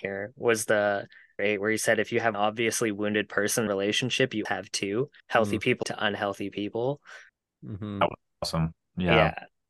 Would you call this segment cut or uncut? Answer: cut